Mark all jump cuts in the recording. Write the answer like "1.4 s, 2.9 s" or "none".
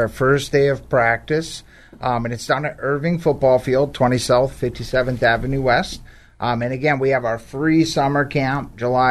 none